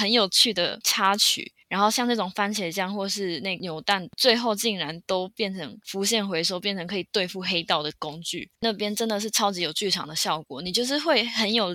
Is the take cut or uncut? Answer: cut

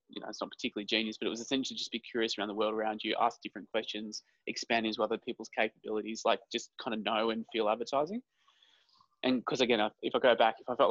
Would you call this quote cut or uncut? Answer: uncut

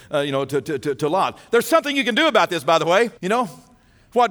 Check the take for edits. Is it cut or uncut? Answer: cut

